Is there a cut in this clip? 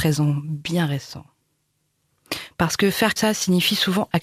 yes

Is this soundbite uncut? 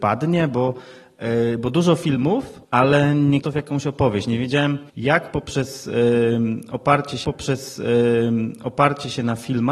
no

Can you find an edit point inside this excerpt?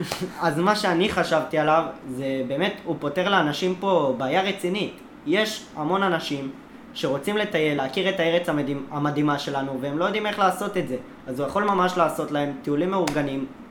no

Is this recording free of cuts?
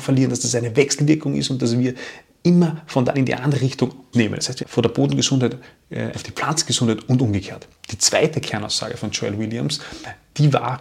no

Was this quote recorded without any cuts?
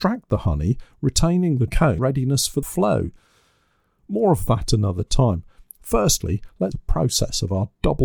no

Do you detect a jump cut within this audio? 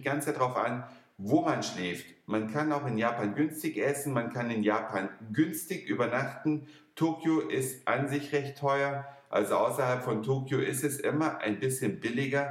no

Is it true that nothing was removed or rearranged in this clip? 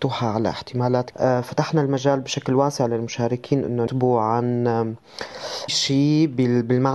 no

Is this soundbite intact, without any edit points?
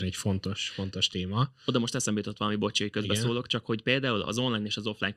yes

